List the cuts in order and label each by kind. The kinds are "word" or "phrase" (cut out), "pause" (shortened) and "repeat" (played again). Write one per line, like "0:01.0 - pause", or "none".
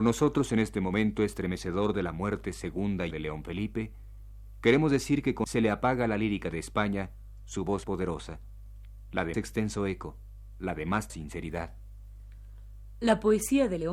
0:03.1 - word
0:05.4 - word
0:07.8 - word
0:09.3 - word
0:11.1 - word